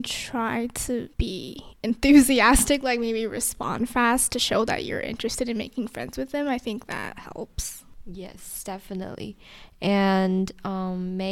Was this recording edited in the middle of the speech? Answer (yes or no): yes